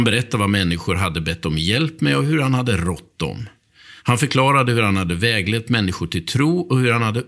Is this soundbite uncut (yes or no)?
no